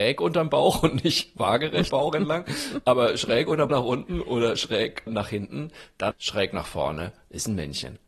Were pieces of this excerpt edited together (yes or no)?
yes